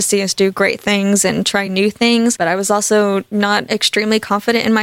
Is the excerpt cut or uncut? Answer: uncut